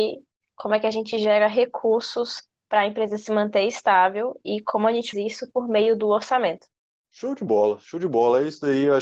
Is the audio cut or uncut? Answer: cut